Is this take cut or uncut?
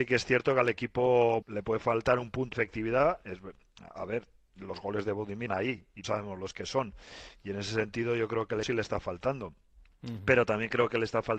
cut